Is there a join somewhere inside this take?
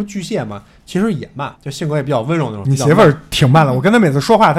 yes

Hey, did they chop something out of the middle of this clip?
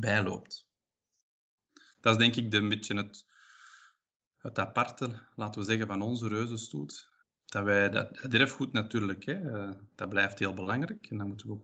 no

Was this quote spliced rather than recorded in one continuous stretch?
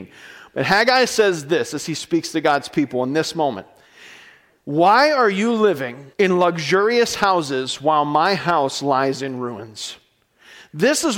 yes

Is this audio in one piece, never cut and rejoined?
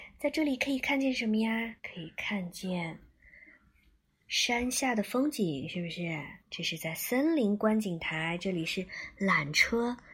no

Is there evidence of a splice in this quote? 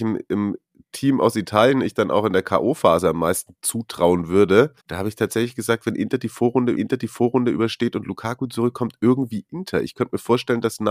yes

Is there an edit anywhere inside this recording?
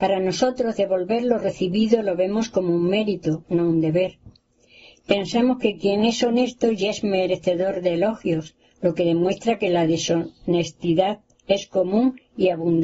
no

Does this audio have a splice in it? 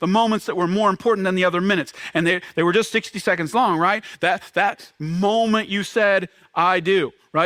no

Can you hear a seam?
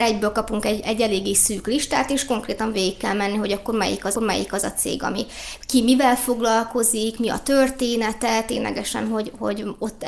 yes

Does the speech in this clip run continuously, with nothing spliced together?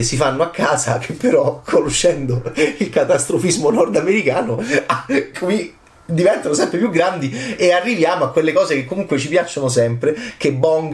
yes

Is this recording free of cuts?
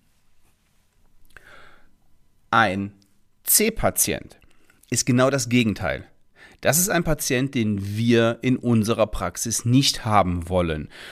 yes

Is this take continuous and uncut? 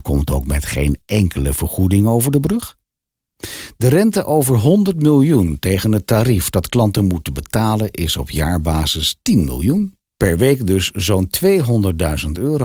yes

